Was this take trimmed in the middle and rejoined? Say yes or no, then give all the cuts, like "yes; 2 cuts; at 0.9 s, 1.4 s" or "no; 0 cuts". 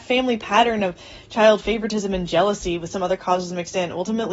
no; 0 cuts